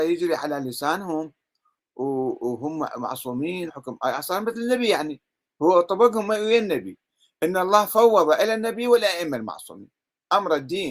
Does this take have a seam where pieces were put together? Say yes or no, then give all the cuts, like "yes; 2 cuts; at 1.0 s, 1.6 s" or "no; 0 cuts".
yes; 1 cut; at 3.7 s